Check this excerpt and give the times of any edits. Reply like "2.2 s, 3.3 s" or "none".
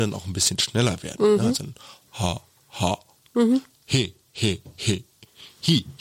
2.1 s